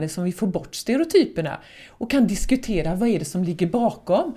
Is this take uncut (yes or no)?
yes